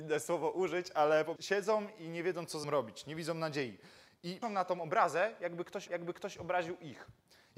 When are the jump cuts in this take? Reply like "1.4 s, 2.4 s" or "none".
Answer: 1.4 s, 2.6 s, 4.4 s, 5.9 s